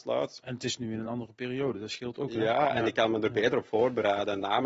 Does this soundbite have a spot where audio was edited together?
no; 0 cuts

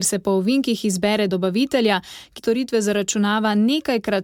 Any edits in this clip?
yes; 2 cuts; at 1.3 s, 2.4 s

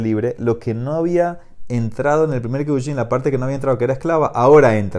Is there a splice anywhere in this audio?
no; 0 cuts

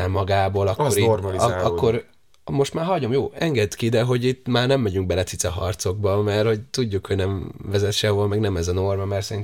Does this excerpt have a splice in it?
no; 0 cuts

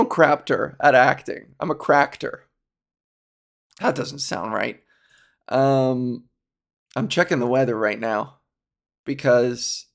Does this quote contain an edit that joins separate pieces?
no; 0 cuts

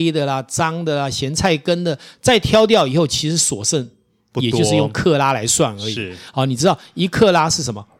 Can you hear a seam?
no; 0 cuts

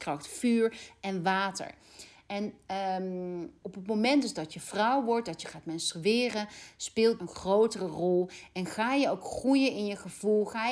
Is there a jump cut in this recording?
yes; 2 cuts; at 3.6 s, 7.2 s

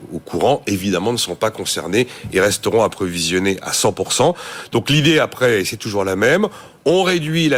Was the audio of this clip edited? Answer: no; 0 cuts

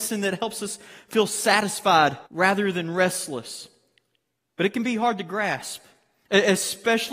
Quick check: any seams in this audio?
yes; 1 cut; at 2.3 s

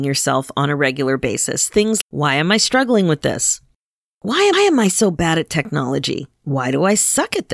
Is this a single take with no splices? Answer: no; 3 cuts; at 2.0 s, 4.5 s, 6.4 s

